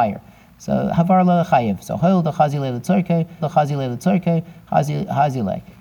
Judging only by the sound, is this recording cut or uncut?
cut